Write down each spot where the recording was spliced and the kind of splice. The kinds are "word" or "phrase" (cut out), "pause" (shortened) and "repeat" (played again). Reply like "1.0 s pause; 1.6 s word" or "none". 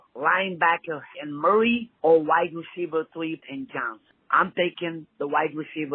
1.1 s word; 3.4 s word

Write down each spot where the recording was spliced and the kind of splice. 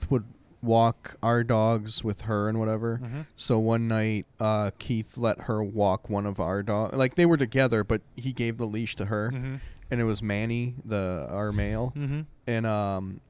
4.3 s pause; 8.1 s pause

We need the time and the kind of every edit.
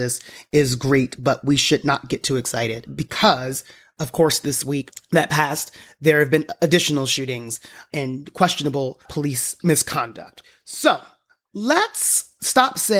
none

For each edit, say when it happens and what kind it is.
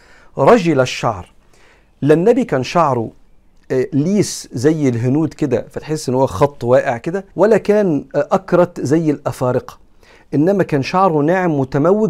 7.3 s pause

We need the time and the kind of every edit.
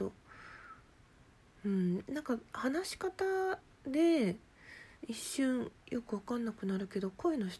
5.0 s pause

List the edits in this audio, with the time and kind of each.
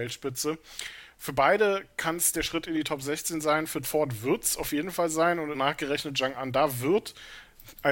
3.8 s word; 5.5 s phrase

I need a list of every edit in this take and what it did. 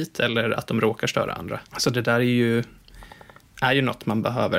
1.7 s pause

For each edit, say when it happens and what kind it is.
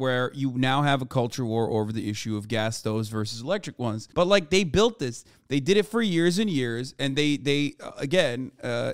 none

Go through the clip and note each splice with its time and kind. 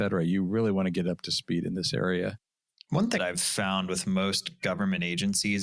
3.2 s phrase

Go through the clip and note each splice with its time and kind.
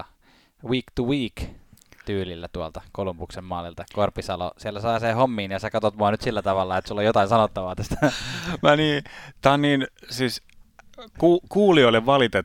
none

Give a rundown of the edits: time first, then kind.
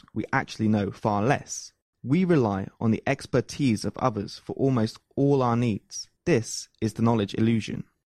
1.9 s pause; 6.2 s pause

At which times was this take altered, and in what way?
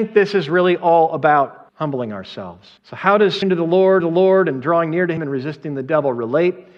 1.7 s pause; 2.8 s pause; 3.4 s word; 4.0 s repeat; 5.2 s word

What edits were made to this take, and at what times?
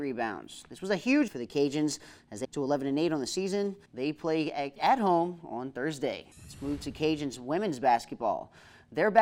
1.3 s word; 2.4 s word; 3.9 s pause; 4.8 s phrase; 6.3 s pause

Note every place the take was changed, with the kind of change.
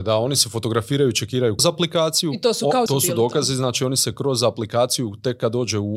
1.6 s word; 2.9 s phrase

